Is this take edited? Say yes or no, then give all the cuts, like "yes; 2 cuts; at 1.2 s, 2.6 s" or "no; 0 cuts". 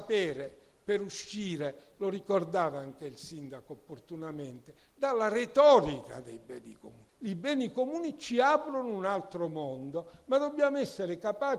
yes; 1 cut; at 7.1 s